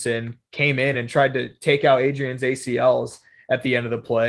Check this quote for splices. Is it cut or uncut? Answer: uncut